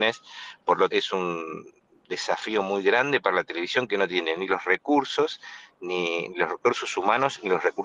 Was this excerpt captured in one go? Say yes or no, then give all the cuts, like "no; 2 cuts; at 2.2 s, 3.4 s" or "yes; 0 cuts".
no; 1 cut; at 0.9 s